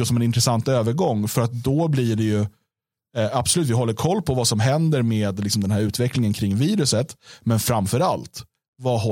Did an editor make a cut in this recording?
no; 0 cuts

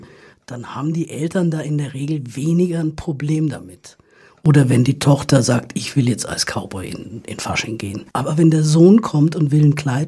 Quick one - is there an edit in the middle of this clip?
no; 0 cuts

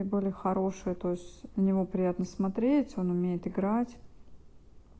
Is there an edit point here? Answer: yes; 1 cut; at 1.5 s

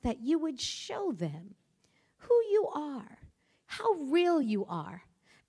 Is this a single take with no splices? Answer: yes; 0 cuts

